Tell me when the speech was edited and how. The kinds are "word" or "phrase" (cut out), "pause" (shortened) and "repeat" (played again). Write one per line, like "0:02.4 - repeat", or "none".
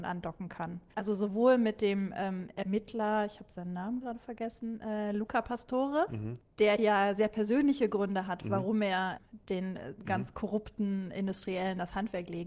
0:00.9 - pause